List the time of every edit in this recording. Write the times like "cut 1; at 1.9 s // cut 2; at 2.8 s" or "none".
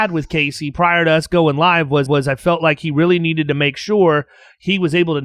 cut 1; at 2.1 s